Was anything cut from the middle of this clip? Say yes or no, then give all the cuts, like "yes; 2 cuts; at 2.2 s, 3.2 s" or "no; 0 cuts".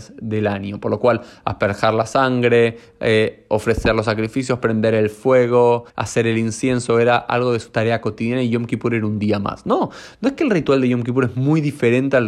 yes; 1 cut; at 5.9 s